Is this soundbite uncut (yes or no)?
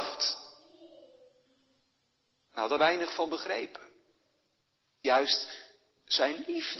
no